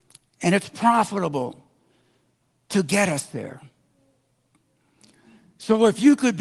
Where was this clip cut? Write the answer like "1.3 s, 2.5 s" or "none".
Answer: none